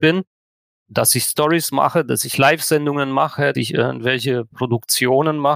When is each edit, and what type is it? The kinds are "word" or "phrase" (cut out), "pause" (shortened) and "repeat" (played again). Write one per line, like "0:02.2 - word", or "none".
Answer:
0:03.5 - word